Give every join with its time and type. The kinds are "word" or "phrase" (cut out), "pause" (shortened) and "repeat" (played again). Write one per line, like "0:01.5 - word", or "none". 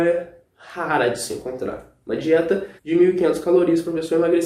0:02.8 - pause